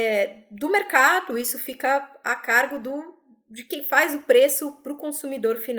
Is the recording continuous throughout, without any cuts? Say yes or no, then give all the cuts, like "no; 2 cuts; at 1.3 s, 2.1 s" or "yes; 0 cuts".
yes; 0 cuts